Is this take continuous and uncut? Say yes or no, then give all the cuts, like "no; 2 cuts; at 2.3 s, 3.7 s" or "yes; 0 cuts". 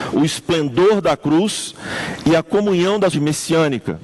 no; 1 cut; at 3.1 s